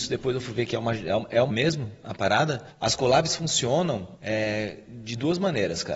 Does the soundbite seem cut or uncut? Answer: cut